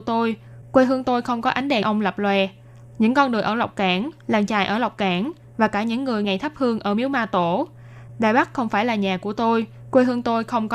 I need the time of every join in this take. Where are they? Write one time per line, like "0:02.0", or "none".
0:01.8
0:06.2